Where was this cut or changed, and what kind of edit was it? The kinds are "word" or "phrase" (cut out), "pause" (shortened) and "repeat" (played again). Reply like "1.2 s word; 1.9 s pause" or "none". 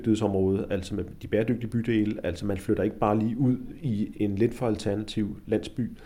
4.1 s word